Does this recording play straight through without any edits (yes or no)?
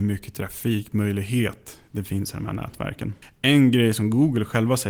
yes